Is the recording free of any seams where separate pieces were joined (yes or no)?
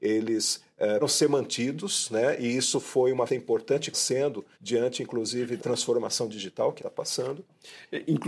no